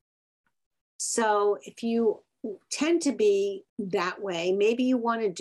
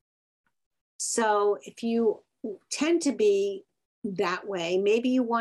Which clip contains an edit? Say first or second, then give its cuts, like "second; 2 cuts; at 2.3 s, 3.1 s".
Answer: first; 1 cut; at 3.7 s